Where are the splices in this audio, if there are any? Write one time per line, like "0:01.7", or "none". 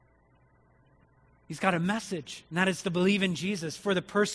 0:02.5

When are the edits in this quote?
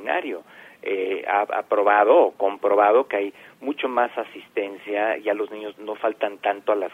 0:05.7

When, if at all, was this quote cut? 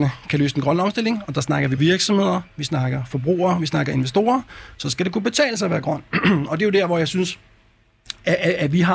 0:01.8

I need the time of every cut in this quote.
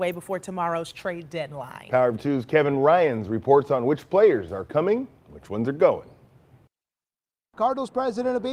none

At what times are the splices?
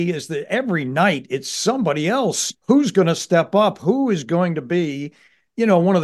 0:02.6

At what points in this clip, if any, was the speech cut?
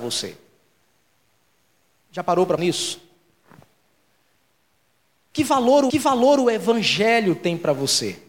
0:02.6
0:05.9

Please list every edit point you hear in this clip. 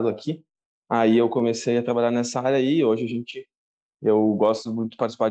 none

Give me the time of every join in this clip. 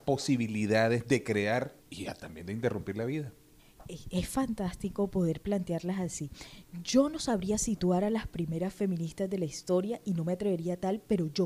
0:01.8

